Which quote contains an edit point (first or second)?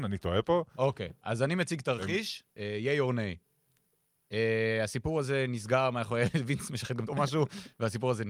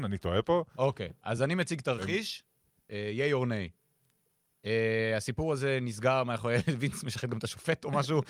first